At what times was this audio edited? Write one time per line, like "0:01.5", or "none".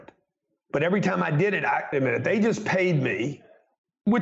0:01.9